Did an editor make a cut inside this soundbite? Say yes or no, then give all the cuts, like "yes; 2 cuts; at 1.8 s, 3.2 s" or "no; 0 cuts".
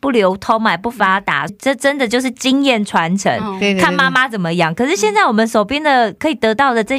yes; 1 cut; at 1.5 s